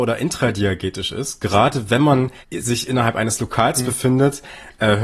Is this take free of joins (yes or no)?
no